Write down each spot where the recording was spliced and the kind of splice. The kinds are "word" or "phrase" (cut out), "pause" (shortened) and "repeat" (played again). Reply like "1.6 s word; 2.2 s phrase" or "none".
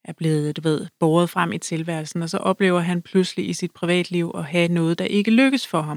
none